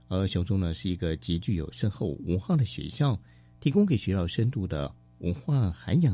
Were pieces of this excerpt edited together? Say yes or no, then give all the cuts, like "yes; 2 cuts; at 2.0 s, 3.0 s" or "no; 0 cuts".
no; 0 cuts